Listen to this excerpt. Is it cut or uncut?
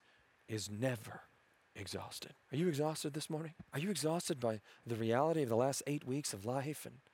cut